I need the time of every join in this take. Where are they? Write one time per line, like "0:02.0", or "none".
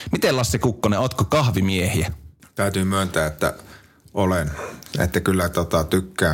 none